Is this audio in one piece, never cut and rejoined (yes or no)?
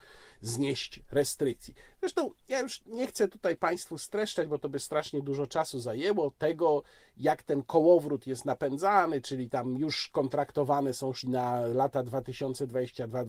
no